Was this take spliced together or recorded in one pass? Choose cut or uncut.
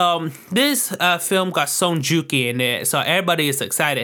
uncut